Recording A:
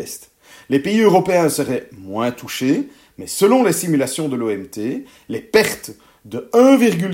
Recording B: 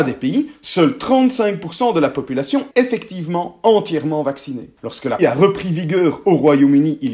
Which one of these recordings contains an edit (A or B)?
B